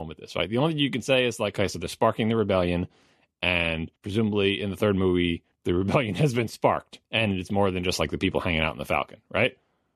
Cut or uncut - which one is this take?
cut